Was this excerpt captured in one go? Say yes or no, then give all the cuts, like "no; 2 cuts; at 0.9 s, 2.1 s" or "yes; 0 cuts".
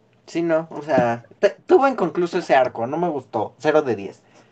yes; 0 cuts